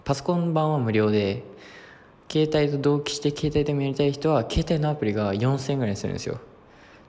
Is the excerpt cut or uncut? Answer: uncut